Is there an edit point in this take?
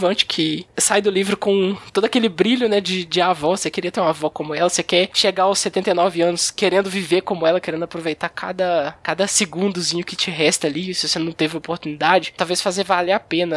no; 0 cuts

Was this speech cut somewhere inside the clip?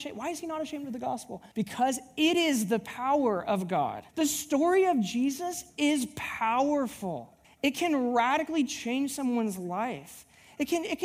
yes; 3 cuts; at 1.5 s, 4.1 s, 7.4 s

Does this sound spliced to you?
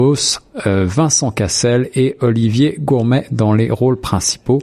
no; 0 cuts

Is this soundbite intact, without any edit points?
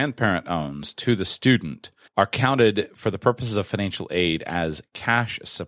no; 1 cut; at 2.1 s

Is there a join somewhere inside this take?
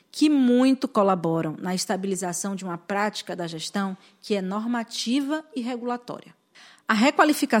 no; 0 cuts

